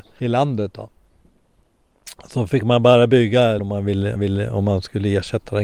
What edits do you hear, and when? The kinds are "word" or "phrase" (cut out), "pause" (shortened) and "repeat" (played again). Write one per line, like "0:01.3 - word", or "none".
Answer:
0:03.6 - word
0:04.2 - repeat